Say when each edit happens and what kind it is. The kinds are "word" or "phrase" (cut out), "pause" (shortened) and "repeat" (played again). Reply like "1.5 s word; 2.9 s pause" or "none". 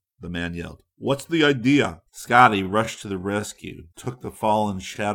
2.1 s pause; 3.9 s pause